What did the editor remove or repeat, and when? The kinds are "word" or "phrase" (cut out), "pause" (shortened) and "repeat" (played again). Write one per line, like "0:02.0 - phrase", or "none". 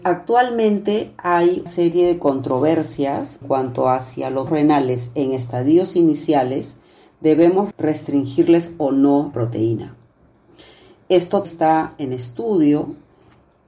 0:01.7 - word
0:03.4 - word
0:04.5 - word
0:07.7 - word
0:09.3 - word
0:11.4 - word